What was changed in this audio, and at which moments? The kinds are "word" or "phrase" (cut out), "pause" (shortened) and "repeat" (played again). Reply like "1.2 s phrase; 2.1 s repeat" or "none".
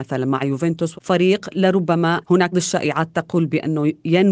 0.9 s word; 2.2 s word; 2.5 s word